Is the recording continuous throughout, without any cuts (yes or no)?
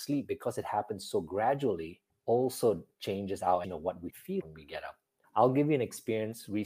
no